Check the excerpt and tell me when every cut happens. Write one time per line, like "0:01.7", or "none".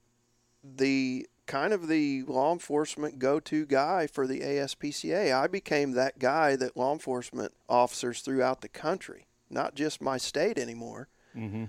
0:01.4
0:07.6